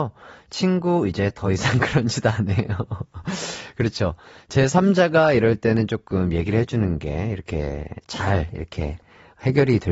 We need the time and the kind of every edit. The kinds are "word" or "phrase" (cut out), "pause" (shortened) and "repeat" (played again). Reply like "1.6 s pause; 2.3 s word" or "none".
none